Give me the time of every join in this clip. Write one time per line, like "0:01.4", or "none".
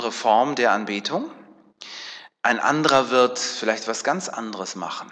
none